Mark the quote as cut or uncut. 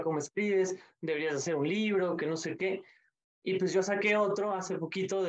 uncut